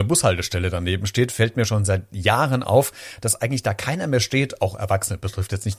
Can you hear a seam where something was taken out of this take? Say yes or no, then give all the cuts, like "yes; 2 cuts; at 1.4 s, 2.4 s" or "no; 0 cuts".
no; 0 cuts